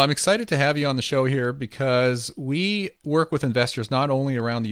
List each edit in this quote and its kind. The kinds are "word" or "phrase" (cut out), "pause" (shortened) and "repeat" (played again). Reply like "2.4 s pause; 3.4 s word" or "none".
3.0 s pause